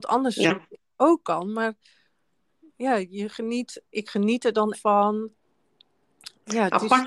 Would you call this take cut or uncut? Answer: cut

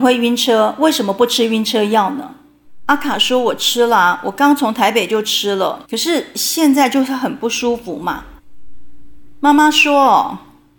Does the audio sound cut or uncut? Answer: cut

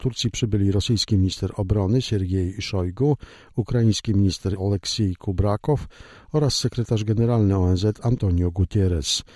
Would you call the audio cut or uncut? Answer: cut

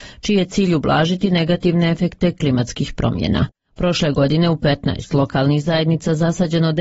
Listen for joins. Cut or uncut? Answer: uncut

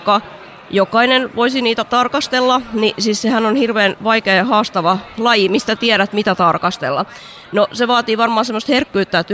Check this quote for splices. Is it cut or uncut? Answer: uncut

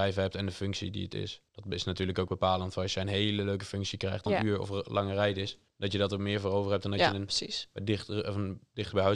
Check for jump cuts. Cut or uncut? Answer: cut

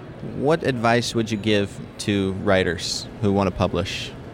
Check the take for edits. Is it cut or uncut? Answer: uncut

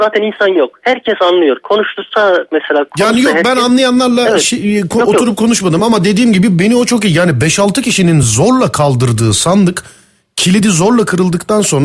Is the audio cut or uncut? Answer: uncut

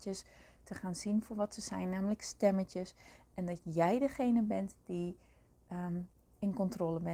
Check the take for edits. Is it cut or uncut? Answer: uncut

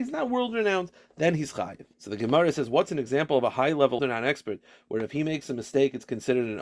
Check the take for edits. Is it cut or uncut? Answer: cut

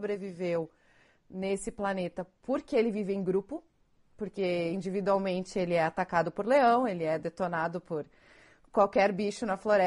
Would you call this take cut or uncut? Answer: uncut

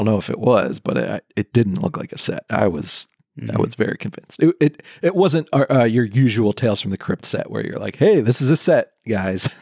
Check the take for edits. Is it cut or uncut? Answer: uncut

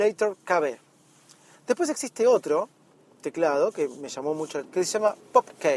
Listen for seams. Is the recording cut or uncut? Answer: cut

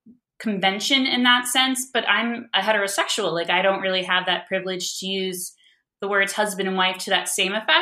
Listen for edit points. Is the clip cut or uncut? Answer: uncut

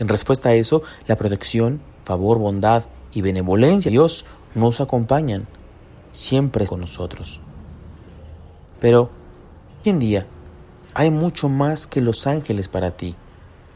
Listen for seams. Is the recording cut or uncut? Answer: cut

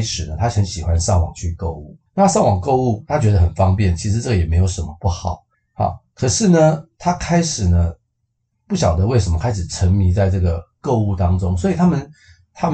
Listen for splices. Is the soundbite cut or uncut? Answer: cut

